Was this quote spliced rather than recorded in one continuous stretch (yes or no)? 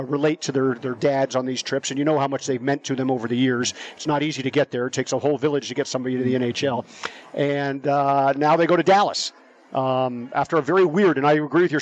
no